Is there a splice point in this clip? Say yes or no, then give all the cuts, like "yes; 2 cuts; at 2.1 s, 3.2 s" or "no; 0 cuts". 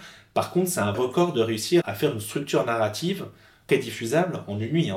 yes; 3 cuts; at 0.9 s, 1.8 s, 3.7 s